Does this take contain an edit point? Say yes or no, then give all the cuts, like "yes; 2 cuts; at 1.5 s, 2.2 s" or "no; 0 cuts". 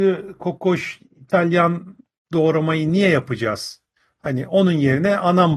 no; 0 cuts